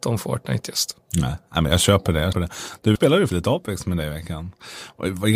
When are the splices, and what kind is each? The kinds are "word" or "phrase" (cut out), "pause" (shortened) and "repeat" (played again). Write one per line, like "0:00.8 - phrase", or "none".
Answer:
0:02.3 - word
0:03.0 - word
0:03.3 - word